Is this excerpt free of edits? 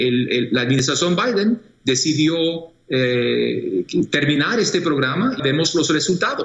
no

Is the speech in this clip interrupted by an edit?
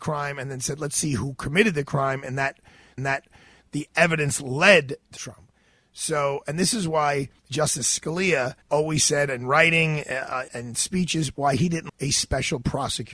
yes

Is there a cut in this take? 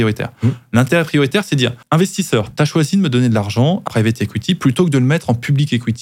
yes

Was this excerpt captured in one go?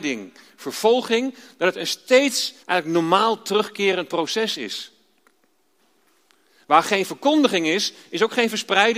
no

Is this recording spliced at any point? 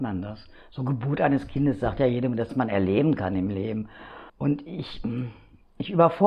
yes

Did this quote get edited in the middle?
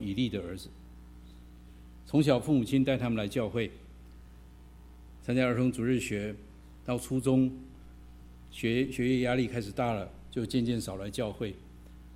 no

